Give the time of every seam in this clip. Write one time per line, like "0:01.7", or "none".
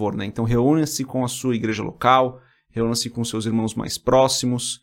none